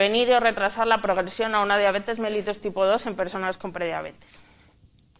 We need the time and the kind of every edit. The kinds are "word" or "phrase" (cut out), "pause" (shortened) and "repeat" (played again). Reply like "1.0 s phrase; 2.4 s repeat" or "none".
none

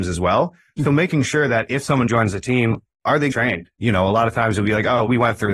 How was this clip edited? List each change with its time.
2.1 s word; 3.3 s word

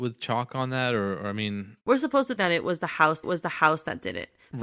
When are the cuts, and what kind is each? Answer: 1.8 s pause; 2.4 s word; 3.2 s repeat

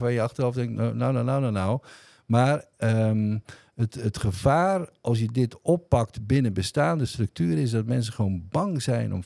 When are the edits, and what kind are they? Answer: none

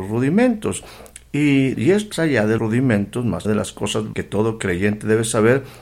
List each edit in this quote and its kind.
1.7 s word; 2.1 s phrase; 2.6 s word; 3.4 s word; 4.1 s word

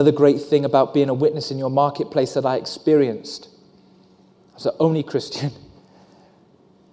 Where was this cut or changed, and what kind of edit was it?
none

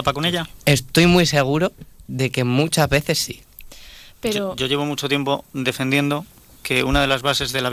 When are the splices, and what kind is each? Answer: none

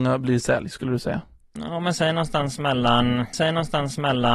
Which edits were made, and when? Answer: 1.4 s pause; 3.3 s repeat

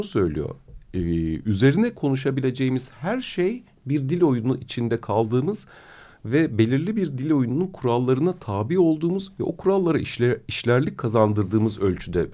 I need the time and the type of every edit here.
none

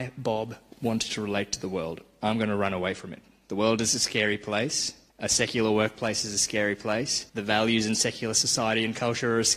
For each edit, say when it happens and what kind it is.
5.1 s pause; 7.3 s pause

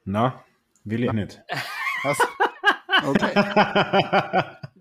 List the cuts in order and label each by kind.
1.1 s word

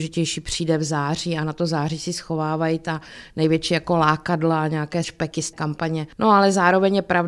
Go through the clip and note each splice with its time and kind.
5.0 s word; 5.5 s word

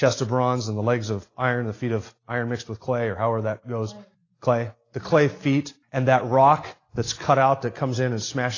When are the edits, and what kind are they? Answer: 2.2 s pause; 4.1 s pause; 5.8 s pause

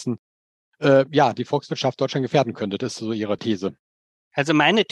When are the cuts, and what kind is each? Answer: 3.4 s word

